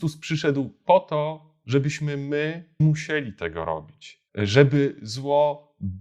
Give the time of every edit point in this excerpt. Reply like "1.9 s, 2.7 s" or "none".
2.8 s, 4.3 s